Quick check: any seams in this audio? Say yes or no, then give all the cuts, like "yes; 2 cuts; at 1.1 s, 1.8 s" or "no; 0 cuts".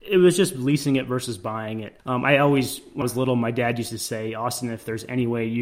yes; 2 cuts; at 2.0 s, 3.0 s